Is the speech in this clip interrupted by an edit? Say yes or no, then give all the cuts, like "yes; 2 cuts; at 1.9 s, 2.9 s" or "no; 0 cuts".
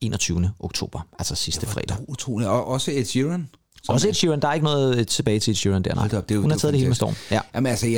no; 0 cuts